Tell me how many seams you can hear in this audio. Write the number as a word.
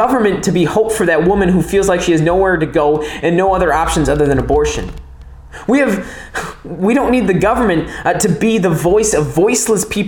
zero